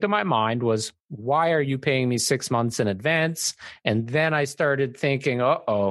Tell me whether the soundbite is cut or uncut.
cut